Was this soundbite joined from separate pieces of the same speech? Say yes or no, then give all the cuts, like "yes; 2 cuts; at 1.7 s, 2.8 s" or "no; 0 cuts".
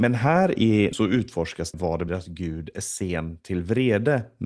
yes; 3 cuts; at 0.9 s, 1.7 s, 2.1 s